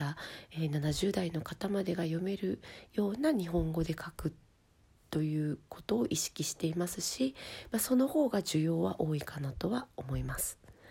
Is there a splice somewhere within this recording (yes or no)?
no